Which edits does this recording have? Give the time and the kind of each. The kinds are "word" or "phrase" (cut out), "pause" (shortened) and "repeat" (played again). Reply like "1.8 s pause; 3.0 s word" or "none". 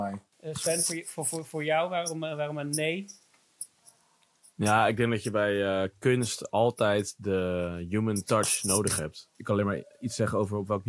none